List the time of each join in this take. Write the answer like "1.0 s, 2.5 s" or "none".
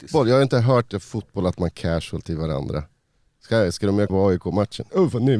1.7 s, 4.1 s